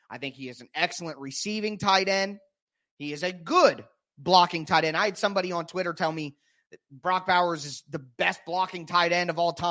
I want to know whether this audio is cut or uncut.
uncut